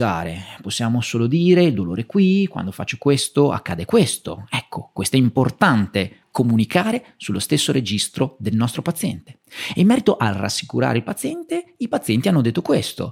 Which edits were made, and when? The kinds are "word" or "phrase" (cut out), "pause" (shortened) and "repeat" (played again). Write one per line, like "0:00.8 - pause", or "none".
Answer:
0:06.2 - pause